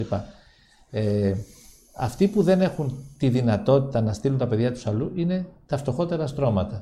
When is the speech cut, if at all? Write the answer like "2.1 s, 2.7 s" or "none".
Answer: none

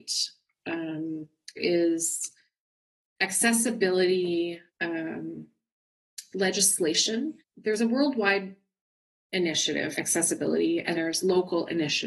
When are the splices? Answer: 1.6 s, 4.7 s, 7.4 s, 9.9 s, 10.9 s

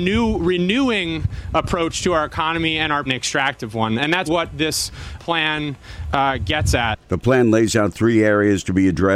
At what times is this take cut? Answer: 3.1 s, 4.3 s, 5.2 s, 7.0 s

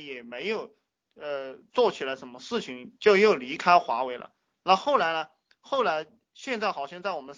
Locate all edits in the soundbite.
none

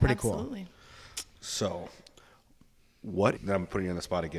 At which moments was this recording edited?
1.3 s, 3.4 s

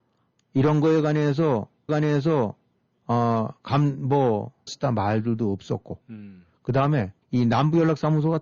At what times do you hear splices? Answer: 1.9 s, 4.7 s, 7.2 s

